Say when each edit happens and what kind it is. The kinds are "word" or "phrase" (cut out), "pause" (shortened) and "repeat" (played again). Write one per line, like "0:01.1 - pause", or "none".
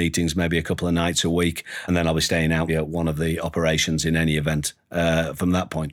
0:01.9 - word
0:02.7 - word